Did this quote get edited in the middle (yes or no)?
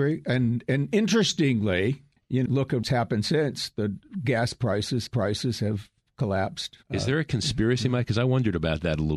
yes